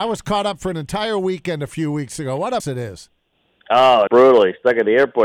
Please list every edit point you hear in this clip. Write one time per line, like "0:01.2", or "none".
0:02.6
0:04.1